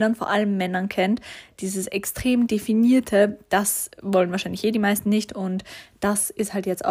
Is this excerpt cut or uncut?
uncut